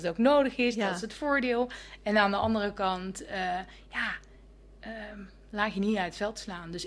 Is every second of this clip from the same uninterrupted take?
yes; 0 cuts

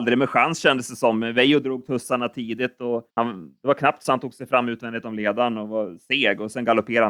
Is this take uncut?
no; 1 cut; at 3.1 s

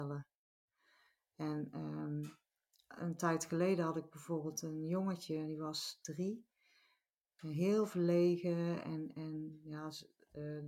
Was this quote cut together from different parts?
no; 0 cuts

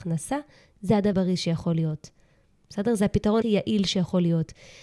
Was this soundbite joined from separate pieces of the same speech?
yes; 2 cuts; at 1.1 s, 3.4 s

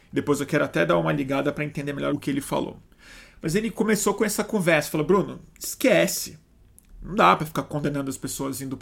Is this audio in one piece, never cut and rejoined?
no; 1 cut; at 2.1 s

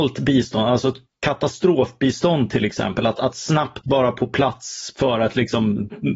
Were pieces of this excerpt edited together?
no; 0 cuts

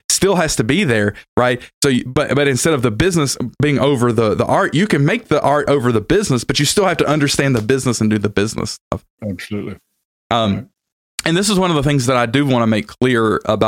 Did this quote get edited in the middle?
no; 0 cuts

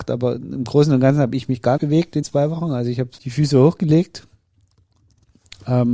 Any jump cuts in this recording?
yes; 3 cuts; at 1.8 s, 2.2 s, 3.2 s

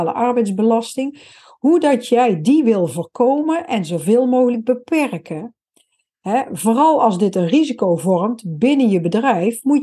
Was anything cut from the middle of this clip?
no; 0 cuts

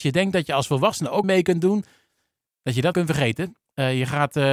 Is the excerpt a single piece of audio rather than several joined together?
no; 2 cuts; at 1.2 s, 2.9 s

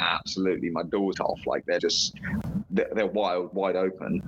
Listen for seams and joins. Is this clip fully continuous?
no; 2 cuts; at 1.1 s, 1.8 s

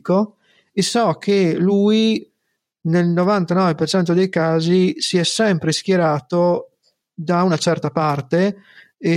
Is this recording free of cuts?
yes; 0 cuts

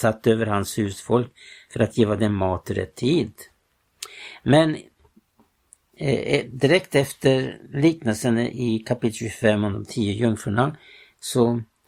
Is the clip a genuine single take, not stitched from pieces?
yes; 0 cuts

